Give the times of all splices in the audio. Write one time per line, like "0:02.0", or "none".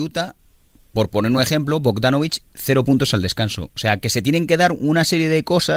none